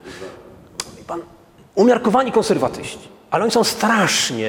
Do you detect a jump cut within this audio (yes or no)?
no